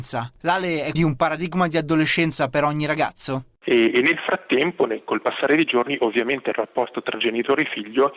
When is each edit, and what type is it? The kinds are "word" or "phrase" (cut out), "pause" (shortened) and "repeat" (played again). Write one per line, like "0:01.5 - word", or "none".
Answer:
0:00.9 - word